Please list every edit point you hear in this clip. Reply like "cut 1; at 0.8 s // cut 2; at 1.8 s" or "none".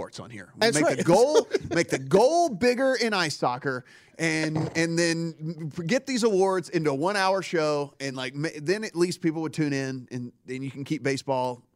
none